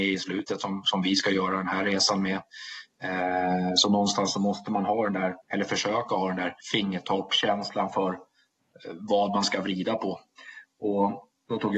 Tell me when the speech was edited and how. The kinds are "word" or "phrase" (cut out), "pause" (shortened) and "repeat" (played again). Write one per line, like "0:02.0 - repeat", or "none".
0:05.4 - pause
0:06.6 - pause